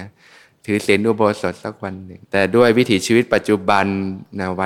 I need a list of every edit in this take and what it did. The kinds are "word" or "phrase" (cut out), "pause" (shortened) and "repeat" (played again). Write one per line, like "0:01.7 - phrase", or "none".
0:02.2 - pause